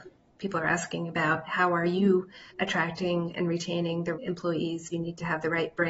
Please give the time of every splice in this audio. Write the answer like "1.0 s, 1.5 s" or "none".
2.5 s, 4.1 s, 4.9 s